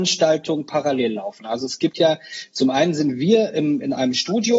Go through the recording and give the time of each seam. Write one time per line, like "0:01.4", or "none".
none